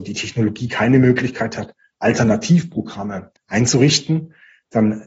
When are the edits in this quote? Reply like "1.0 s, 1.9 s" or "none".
3.4 s